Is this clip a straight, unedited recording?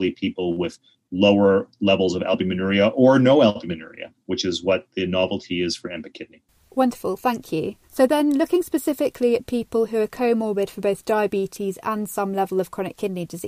no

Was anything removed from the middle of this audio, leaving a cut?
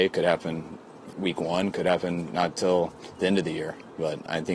no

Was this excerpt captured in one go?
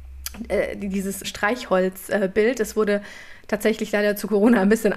no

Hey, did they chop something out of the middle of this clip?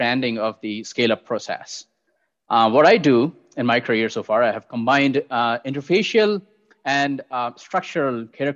no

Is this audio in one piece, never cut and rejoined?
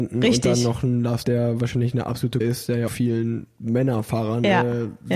no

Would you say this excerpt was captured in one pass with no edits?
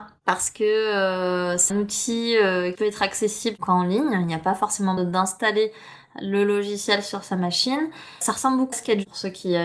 no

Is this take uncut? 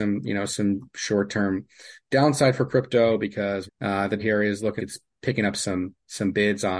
no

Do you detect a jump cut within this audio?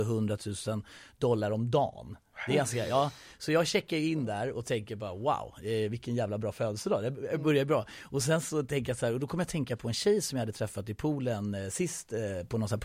no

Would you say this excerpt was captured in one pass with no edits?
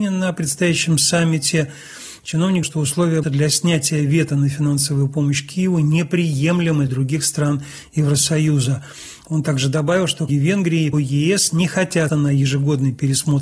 no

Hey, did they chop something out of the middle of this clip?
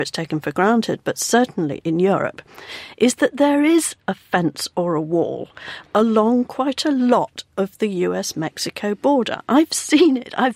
no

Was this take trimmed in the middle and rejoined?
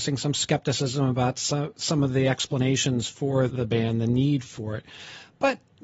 yes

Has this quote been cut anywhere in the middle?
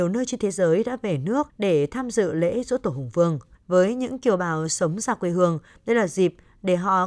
yes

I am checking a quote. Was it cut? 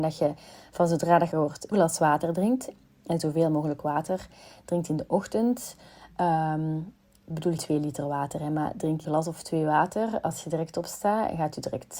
yes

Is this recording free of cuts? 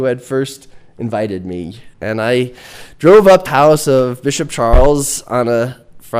no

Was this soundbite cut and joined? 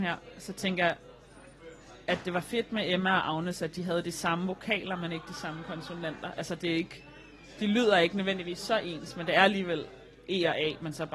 no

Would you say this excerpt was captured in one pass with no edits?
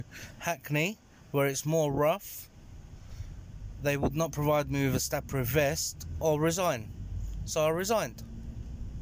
yes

